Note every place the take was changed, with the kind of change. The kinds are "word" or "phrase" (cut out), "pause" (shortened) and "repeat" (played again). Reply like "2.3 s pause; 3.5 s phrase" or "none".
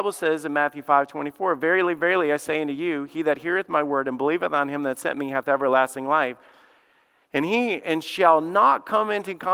none